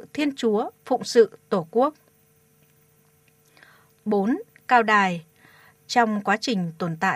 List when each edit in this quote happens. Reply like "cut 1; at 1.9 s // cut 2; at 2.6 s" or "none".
none